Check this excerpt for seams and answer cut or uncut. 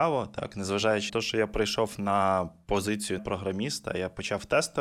cut